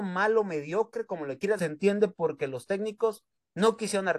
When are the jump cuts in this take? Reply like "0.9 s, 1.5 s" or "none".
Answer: 1.6 s